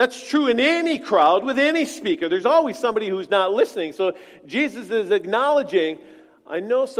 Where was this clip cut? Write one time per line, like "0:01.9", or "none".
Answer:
none

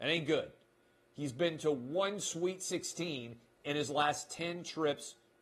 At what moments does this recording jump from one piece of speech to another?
none

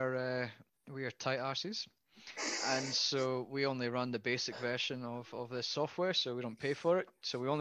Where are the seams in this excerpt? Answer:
none

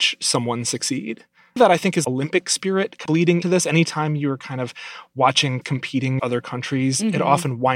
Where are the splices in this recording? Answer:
0:01.6
0:02.0
0:03.1
0:03.4
0:05.6
0:06.2

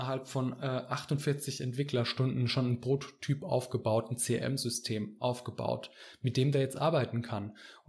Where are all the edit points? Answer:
none

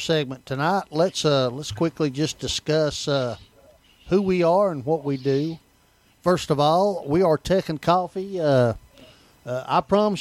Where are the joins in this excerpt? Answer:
none

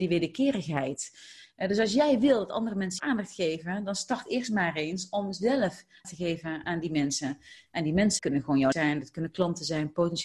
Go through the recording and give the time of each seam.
0:03.0
0:06.0
0:06.6
0:08.2
0:08.7

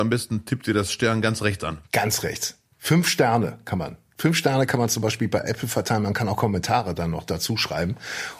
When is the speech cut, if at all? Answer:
0:01.9

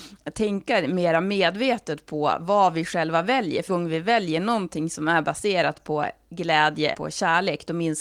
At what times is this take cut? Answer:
0:03.7
0:06.9

